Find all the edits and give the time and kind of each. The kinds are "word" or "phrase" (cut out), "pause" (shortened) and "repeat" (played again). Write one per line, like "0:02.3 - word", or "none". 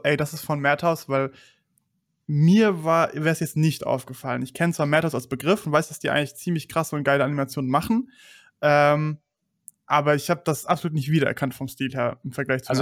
none